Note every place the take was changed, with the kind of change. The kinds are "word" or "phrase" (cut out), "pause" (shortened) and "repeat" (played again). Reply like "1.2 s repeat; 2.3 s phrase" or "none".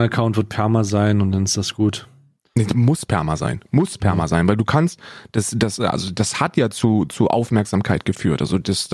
none